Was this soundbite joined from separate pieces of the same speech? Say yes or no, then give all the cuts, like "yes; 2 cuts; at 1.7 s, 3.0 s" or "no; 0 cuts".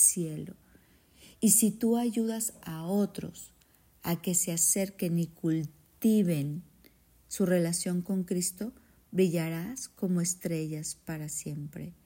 no; 0 cuts